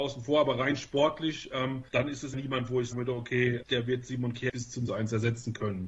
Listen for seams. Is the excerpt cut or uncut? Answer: cut